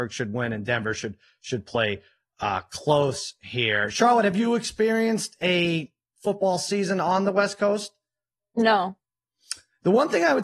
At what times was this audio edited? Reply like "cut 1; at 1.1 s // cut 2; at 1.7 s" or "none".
none